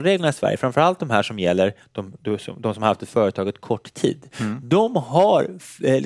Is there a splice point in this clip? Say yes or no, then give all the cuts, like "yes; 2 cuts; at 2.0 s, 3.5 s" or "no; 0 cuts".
no; 0 cuts